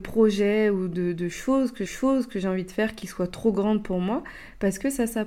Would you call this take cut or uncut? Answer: cut